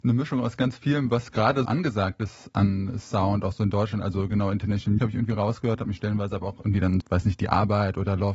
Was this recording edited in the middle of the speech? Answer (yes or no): yes